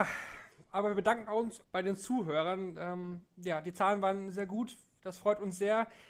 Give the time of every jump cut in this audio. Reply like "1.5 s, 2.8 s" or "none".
1.6 s